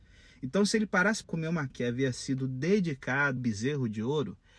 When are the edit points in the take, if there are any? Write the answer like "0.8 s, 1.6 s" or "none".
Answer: 1.2 s, 1.7 s, 3.4 s